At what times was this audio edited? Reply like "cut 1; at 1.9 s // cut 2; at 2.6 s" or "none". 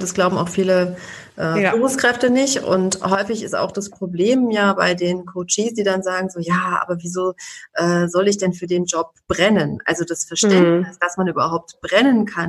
none